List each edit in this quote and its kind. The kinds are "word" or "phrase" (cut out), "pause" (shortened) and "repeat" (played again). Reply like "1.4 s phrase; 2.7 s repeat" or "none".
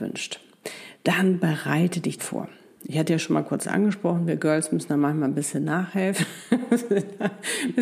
2.2 s word